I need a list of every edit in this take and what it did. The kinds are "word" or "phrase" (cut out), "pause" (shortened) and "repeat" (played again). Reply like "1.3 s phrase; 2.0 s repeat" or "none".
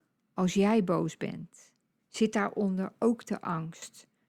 none